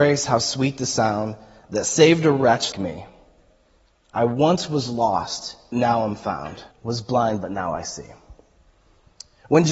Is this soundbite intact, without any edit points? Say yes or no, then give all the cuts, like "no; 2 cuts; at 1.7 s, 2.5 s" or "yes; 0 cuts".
no; 3 cuts; at 2.7 s, 5.7 s, 6.7 s